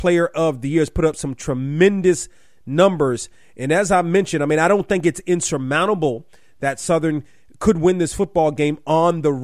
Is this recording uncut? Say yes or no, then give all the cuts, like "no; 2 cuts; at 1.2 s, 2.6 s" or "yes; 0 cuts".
yes; 0 cuts